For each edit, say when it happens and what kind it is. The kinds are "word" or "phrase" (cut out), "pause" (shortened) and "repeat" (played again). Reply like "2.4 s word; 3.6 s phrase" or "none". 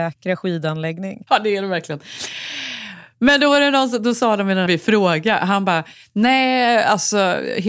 1.3 s pause; 4.7 s phrase

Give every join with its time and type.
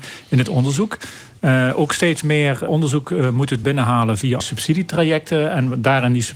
2.7 s word; 3.6 s phrase; 4.4 s word

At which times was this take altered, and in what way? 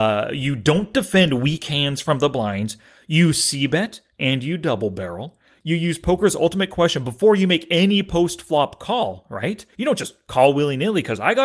none

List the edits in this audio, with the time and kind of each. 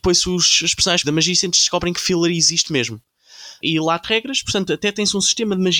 1.0 s word; 4.0 s word

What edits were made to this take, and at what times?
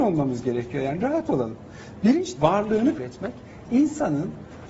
2.4 s word; 3.0 s word

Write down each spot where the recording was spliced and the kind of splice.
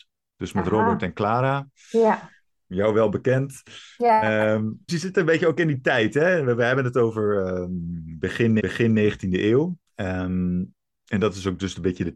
4.9 s word; 8.6 s repeat; 9.9 s pause

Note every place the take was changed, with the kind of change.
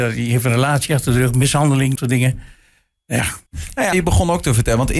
1.9 s word; 3.5 s pause; 3.9 s word

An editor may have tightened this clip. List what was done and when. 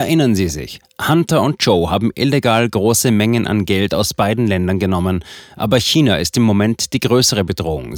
none

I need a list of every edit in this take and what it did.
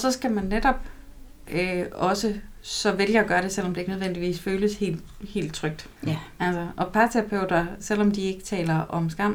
6.0 s pause

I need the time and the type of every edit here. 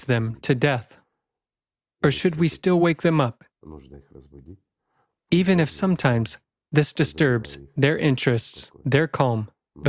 none

